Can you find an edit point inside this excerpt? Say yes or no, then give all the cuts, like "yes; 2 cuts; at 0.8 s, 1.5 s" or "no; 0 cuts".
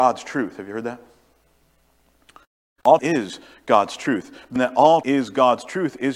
yes; 3 cuts; at 3.0 s, 4.6 s, 5.0 s